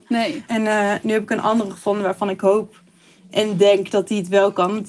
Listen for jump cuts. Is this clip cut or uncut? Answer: uncut